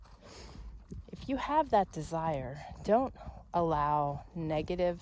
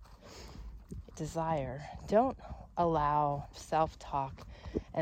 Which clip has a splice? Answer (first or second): second